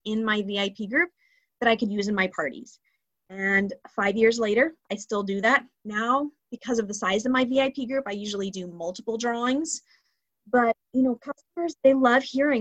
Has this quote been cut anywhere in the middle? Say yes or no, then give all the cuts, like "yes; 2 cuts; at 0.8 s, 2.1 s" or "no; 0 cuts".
no; 0 cuts